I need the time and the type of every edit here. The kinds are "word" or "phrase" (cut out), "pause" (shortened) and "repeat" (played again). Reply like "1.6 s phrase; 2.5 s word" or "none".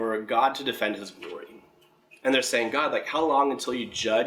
none